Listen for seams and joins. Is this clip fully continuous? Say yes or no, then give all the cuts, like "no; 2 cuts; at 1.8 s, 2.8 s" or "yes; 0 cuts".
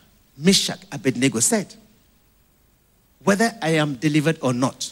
yes; 0 cuts